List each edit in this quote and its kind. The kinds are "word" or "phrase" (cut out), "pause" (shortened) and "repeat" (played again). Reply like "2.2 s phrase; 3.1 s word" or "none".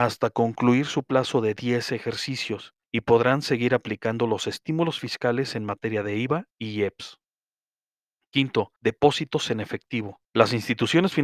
2.8 s pause; 6.5 s pause; 8.8 s pause; 10.2 s pause